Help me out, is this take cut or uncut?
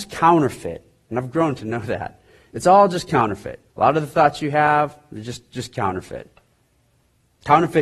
cut